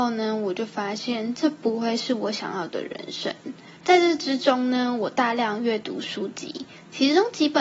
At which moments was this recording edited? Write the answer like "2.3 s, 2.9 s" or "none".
3.8 s